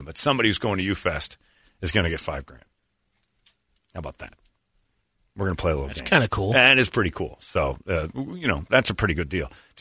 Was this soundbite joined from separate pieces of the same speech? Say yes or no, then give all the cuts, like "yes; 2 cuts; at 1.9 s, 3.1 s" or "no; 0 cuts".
no; 0 cuts